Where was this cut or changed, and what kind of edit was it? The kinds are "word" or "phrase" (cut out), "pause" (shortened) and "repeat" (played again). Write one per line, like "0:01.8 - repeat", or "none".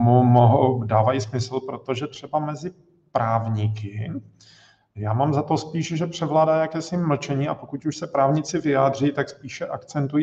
none